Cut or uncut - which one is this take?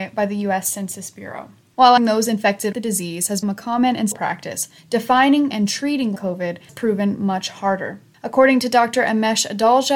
cut